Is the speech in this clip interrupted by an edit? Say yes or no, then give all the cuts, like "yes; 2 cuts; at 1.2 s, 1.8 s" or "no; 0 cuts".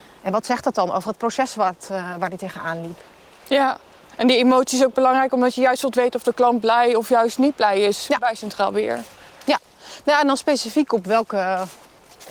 no; 0 cuts